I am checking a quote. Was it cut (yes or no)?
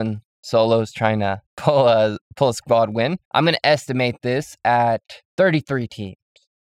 yes